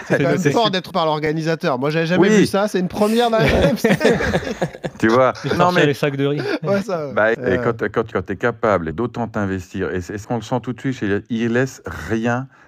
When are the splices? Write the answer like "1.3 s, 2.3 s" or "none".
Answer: 0.9 s, 5.6 s, 6.8 s, 7.3 s, 8.1 s, 8.9 s, 10.2 s